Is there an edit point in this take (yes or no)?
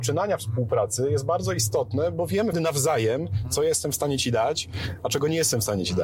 yes